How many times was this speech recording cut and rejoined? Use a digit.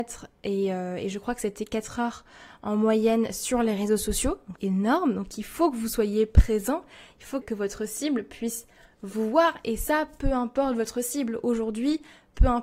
2